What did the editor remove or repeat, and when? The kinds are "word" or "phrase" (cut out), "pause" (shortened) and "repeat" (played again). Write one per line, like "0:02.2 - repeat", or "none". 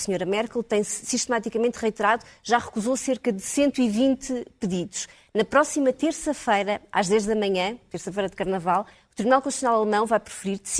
none